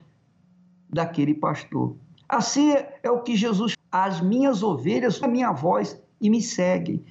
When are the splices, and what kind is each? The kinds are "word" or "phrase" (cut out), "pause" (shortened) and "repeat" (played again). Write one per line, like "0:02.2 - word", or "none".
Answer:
0:03.7 - word
0:05.2 - word